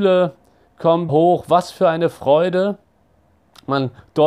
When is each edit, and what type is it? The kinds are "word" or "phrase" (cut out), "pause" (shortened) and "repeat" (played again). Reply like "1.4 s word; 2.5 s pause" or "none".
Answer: 1.1 s word